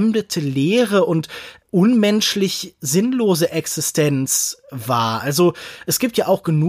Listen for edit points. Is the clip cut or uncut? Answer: uncut